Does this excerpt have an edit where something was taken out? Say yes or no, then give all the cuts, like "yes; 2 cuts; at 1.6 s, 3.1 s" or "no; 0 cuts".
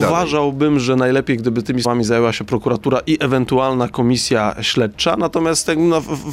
yes; 1 cut; at 1.8 s